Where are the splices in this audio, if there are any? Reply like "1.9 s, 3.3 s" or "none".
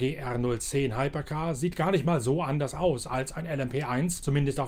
none